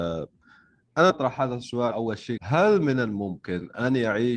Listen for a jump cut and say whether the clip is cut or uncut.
cut